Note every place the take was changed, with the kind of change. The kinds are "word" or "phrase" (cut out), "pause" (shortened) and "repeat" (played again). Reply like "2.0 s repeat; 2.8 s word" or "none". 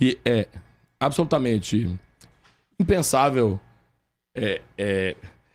none

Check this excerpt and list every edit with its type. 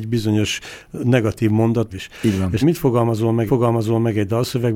1.9 s phrase; 2.6 s word; 3.5 s repeat

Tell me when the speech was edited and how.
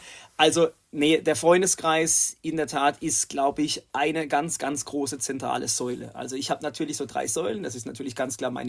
none

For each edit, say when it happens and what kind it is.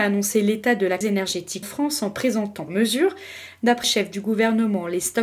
1.0 s word; 1.6 s word; 2.7 s word; 3.8 s word

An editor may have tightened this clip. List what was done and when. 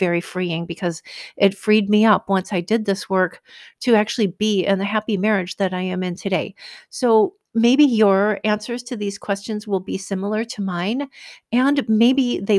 7.5 s pause

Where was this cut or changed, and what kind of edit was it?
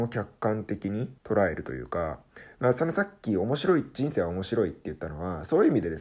1.2 s pause

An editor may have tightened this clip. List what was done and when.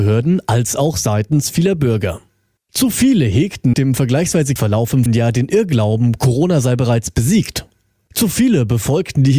3.7 s word; 4.6 s word; 5.1 s word

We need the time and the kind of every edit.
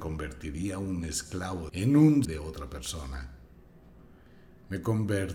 1.7 s phrase; 2.2 s word

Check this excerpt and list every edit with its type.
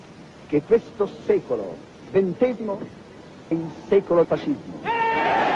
2.1 s word; 3.5 s word; 4.2 s word

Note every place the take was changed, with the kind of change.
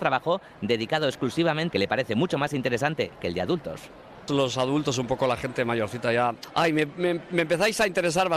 1.7 s phrase; 4.3 s word

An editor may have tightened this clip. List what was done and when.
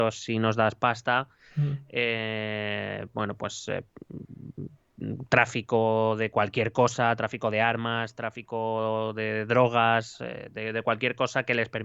none

